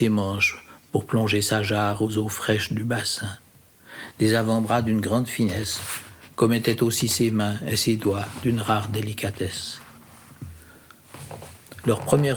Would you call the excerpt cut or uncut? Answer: uncut